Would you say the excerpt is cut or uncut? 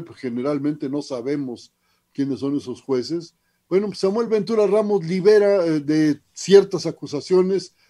uncut